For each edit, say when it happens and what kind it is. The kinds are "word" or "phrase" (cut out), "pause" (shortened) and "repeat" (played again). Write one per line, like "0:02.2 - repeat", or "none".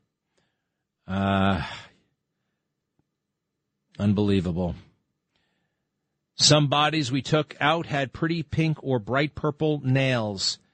none